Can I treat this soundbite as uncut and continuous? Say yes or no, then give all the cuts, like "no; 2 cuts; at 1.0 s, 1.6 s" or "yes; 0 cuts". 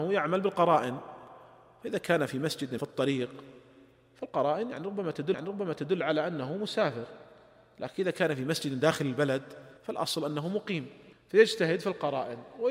no; 4 cuts; at 2.8 s, 5.3 s, 9.8 s, 11.1 s